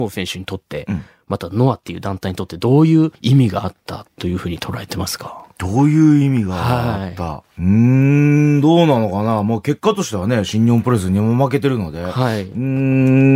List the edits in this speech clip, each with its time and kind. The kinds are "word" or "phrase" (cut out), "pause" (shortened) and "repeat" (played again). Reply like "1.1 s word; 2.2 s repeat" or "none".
3.1 s pause